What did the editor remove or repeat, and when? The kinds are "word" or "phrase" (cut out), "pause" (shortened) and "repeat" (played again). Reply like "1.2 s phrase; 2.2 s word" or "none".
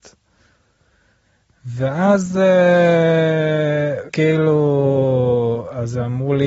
4.1 s word